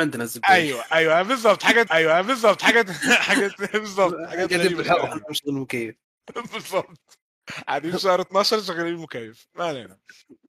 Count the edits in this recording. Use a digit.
2